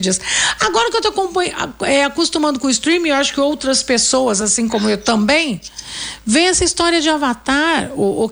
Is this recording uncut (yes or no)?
yes